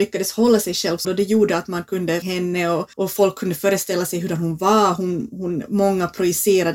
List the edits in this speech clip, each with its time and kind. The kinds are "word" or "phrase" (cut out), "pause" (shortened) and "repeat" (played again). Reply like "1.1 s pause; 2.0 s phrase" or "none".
1.0 s word; 2.2 s phrase; 2.9 s pause